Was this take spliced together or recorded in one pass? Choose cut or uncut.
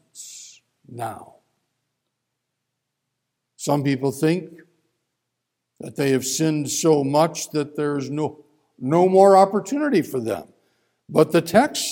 uncut